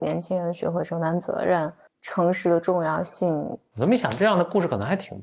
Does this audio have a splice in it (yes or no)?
no